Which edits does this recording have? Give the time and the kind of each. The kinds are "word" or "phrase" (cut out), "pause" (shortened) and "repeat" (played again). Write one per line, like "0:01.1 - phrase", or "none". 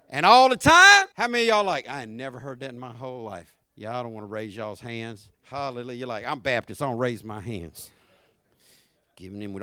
0:01.1 - pause
0:03.6 - pause
0:05.3 - pause

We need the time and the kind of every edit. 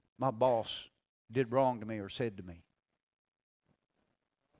none

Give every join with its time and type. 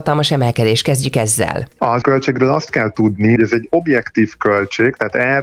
0:02.0 - word
0:03.4 - word

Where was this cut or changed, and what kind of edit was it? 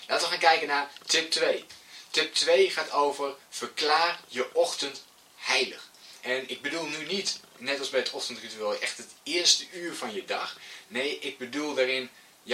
none

